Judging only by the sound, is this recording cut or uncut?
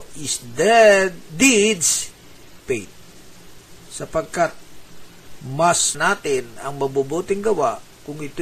cut